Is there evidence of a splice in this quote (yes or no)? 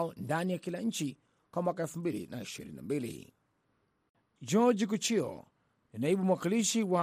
no